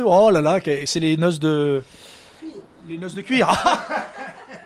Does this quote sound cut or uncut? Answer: uncut